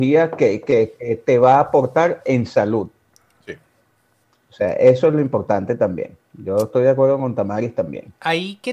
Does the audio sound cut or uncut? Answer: uncut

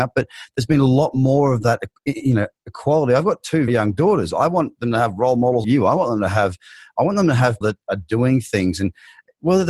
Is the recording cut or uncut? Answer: cut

